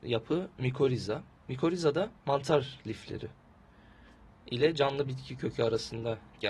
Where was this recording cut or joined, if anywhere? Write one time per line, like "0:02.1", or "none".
0:02.2